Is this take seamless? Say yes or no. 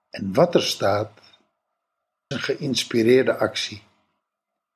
no